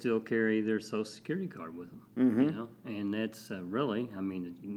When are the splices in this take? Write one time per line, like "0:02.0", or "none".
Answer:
none